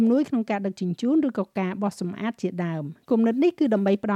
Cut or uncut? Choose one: cut